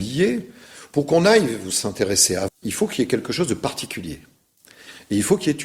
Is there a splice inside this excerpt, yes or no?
yes